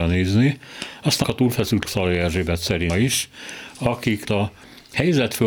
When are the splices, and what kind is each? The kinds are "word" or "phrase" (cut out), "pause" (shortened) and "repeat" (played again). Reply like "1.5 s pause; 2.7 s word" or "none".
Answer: 1.2 s word; 1.8 s word; 2.9 s word; 4.2 s word